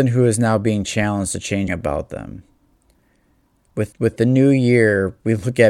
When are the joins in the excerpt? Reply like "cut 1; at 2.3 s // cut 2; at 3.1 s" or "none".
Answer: cut 1; at 1.7 s // cut 2; at 3.9 s

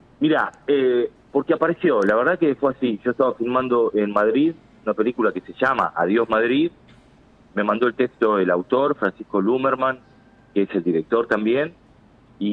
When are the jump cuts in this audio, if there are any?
none

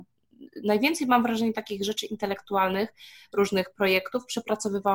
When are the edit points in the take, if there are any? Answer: none

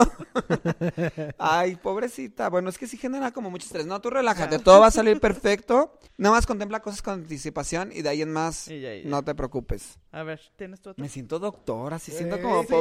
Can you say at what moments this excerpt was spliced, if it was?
cut 1; at 6.1 s // cut 2; at 10.1 s

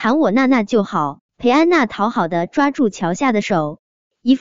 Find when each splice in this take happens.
cut 1; at 1.3 s

